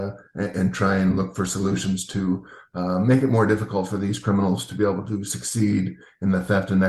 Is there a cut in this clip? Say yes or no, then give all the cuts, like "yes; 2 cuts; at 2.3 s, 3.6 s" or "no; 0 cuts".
no; 0 cuts